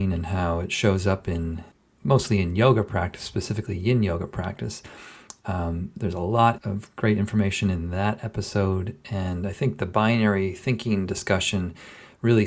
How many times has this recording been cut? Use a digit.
2